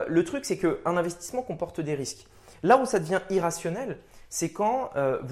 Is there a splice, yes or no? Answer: no